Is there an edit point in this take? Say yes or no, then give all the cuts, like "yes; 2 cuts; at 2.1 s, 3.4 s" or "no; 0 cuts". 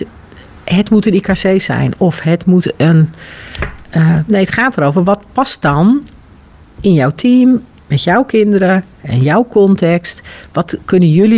no; 0 cuts